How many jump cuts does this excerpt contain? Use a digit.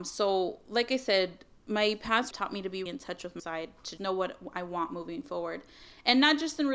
4